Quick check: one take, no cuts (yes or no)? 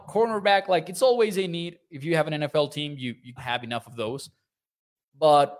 no